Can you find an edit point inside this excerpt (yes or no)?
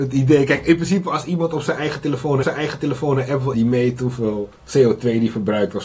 yes